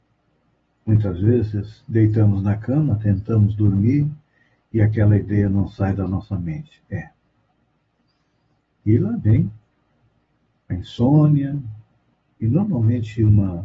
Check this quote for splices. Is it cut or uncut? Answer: uncut